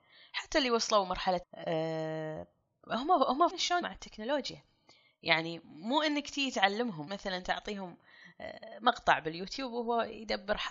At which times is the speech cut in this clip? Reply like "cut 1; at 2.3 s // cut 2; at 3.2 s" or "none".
cut 1; at 1.4 s // cut 2; at 3.5 s // cut 3; at 3.8 s // cut 4; at 7.1 s